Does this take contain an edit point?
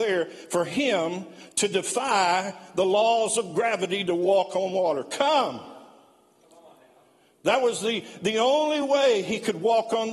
no; 0 cuts

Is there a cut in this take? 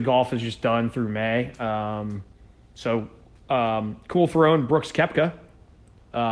no; 0 cuts

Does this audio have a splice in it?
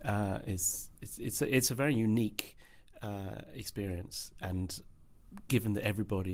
no; 0 cuts

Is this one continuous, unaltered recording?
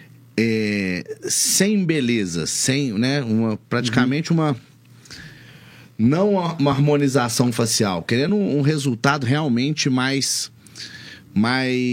yes; 0 cuts

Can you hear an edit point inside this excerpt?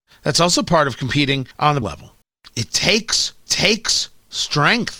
yes; 4 cuts; at 1.5 s, 1.8 s, 2.2 s, 3.5 s

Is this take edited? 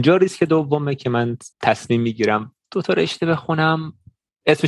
yes; 1 cut; at 1.5 s

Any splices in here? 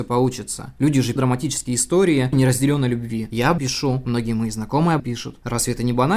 yes; 4 cuts; at 1.2 s, 2.3 s, 3.6 s, 5.0 s

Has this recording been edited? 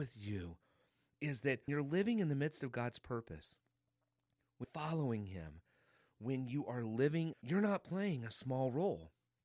yes; 3 cuts; at 1.7 s, 4.6 s, 7.3 s

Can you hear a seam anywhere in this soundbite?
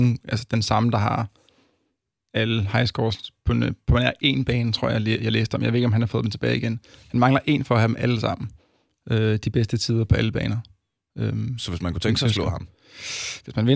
no; 0 cuts

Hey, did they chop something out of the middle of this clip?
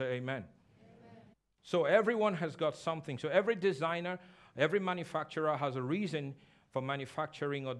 yes; 1 cut; at 1.3 s

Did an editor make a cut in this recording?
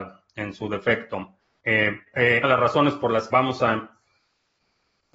yes; 3 cuts; at 1.4 s, 2.4 s, 3.3 s

